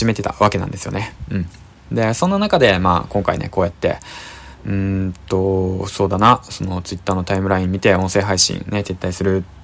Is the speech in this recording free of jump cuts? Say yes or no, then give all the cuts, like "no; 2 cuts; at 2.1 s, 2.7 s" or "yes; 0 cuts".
yes; 0 cuts